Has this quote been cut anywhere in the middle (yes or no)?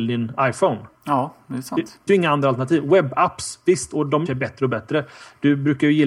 yes